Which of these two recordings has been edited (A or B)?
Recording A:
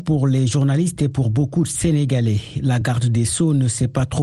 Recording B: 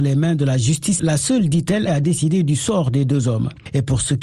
B